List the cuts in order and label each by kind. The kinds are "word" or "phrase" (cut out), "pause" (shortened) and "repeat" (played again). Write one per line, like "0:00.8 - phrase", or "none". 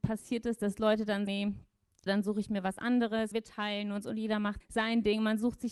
0:01.3 - word
0:02.1 - word
0:03.3 - word
0:04.6 - word